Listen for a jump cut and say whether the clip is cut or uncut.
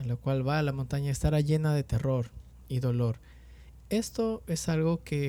uncut